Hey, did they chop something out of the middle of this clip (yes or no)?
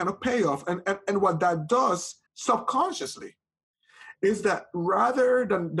yes